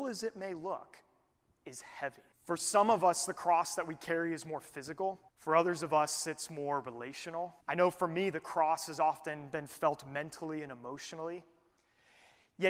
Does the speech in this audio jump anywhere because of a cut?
yes; 3 cuts; at 2.3 s, 5.3 s, 7.6 s

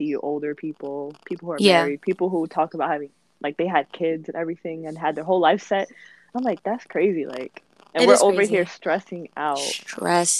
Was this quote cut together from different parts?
no; 0 cuts

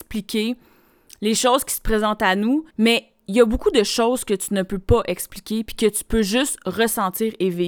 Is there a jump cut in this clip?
yes; 1 cut; at 2.7 s

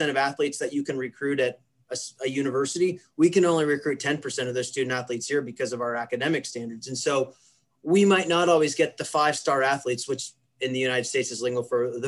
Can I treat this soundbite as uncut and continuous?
yes; 0 cuts

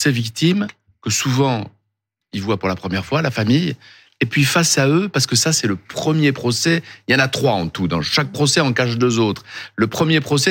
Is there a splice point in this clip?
no; 0 cuts

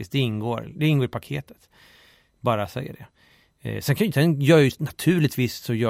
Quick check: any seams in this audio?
no; 0 cuts

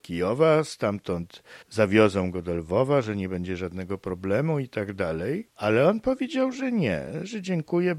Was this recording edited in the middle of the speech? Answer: yes; 1 cut; at 1.6 s

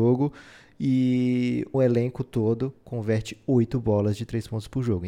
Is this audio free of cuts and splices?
no; 1 cut; at 1.7 s

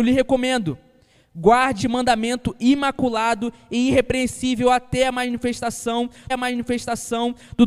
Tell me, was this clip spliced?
yes; 2 cuts; at 1.8 s, 6.3 s

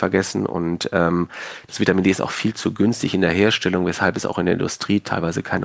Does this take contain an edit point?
no; 0 cuts

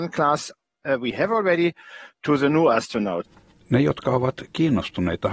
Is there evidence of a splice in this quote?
no; 0 cuts

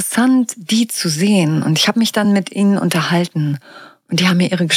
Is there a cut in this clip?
no; 0 cuts

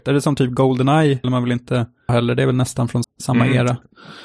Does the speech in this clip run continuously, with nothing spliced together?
no; 3 cuts; at 1.2 s, 2.1 s, 3.0 s

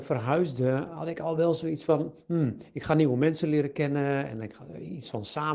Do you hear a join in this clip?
no; 0 cuts

